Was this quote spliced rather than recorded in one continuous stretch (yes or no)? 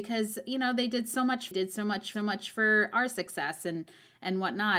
yes